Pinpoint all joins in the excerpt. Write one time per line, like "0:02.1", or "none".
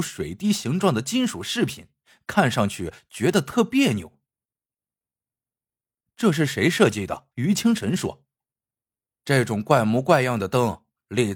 0:07.3
0:08.4